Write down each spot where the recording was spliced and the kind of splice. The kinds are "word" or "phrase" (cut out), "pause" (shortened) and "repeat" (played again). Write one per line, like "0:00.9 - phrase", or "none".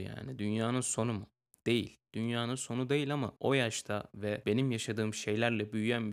0:02.0 - pause
0:03.4 - pause